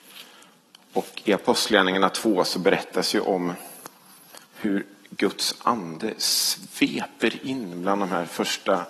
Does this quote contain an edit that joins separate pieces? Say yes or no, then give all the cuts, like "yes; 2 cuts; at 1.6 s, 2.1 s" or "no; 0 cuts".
yes; 1 cut; at 4.4 s